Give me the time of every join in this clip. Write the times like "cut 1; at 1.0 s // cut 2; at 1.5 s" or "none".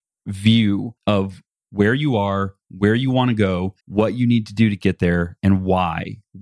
cut 1; at 1.0 s // cut 2; at 3.8 s